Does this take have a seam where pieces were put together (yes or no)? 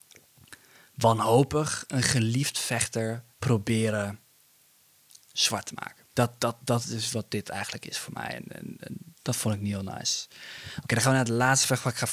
yes